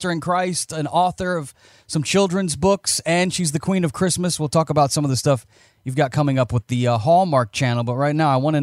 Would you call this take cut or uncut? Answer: uncut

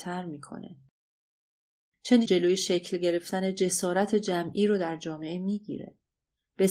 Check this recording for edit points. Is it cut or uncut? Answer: cut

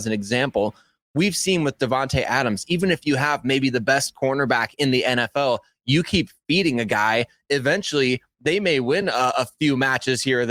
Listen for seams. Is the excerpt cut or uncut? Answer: uncut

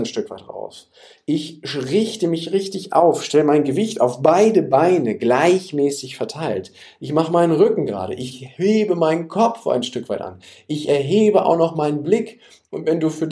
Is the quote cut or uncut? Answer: uncut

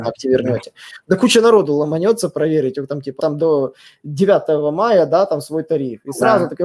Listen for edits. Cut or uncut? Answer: cut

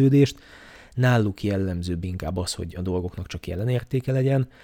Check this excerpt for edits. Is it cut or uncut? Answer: uncut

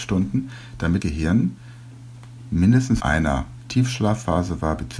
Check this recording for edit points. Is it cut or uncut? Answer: cut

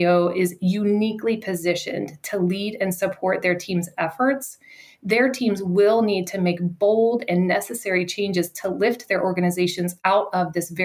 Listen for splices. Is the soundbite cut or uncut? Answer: uncut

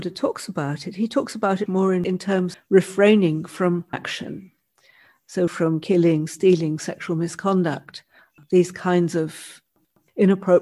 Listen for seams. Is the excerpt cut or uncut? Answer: cut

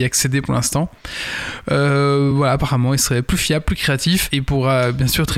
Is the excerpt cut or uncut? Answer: uncut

